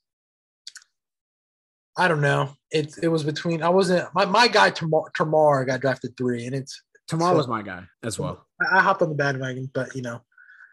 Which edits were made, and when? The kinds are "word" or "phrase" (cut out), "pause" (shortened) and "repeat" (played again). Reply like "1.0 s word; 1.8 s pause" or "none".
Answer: 2.6 s pause; 7.9 s pause; 8.5 s pause